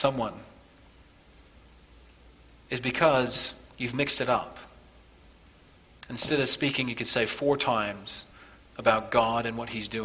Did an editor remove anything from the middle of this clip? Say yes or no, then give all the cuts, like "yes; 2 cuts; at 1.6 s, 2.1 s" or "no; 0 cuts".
no; 0 cuts